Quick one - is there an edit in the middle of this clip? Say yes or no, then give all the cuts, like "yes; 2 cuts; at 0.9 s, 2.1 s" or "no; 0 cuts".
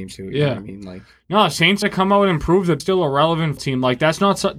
yes; 3 cuts; at 1.8 s, 2.8 s, 3.6 s